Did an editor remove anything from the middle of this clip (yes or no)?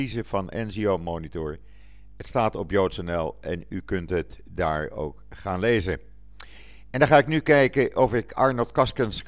no